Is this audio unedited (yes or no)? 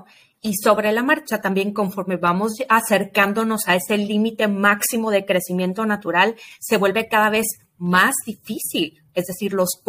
yes